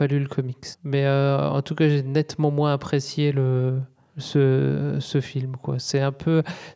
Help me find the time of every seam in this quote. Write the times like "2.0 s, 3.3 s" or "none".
none